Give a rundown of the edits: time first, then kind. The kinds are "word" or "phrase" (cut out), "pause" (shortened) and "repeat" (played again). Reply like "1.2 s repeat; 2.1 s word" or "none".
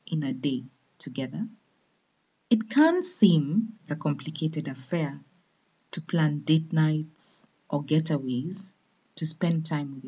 3.9 s word